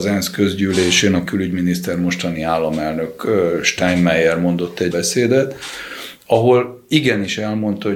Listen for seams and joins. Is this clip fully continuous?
no; 2 cuts; at 1.3 s, 4.9 s

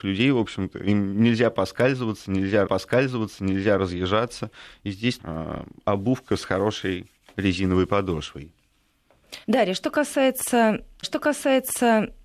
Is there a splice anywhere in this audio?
yes; 4 cuts; at 2.7 s, 5.2 s, 9.4 s, 11.0 s

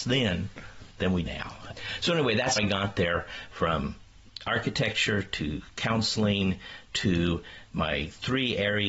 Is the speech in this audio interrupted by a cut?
yes; 3 cuts; at 1.2 s, 2.6 s, 7.7 s

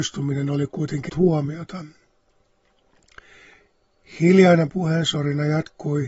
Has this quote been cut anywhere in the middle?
yes; 1 cut; at 1.1 s

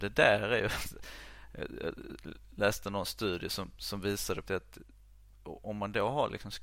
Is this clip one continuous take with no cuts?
no; 1 cut; at 4.5 s

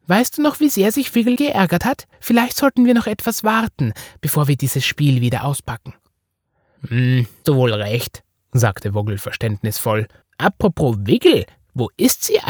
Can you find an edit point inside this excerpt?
yes; 4 cuts; at 1.4 s, 2.1 s, 7.4 s, 10.2 s

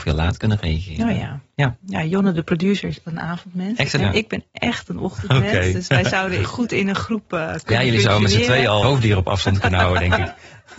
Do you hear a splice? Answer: yes; 4 cuts; at 3.0 s, 4.0 s, 6.4 s, 8.8 s

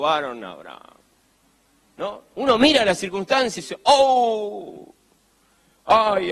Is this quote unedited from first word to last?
no; 1 cut; at 3.6 s

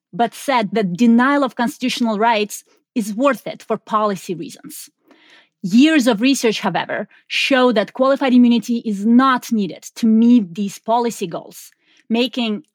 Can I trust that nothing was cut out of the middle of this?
yes; 0 cuts

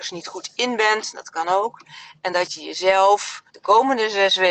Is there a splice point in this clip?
yes; 1 cut; at 3.5 s

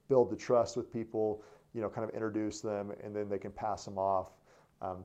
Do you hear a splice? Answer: no; 0 cuts

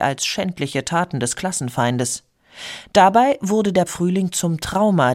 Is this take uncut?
no; 1 cut; at 3.9 s

